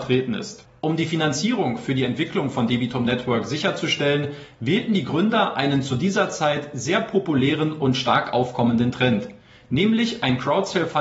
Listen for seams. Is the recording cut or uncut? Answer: uncut